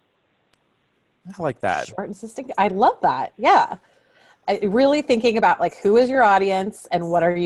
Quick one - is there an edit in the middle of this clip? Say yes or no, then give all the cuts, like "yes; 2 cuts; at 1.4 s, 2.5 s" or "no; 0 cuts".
no; 0 cuts